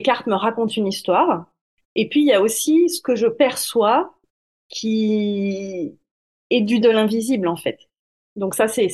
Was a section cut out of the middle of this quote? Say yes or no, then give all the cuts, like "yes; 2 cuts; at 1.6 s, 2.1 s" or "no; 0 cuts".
yes; 1 cut; at 6.8 s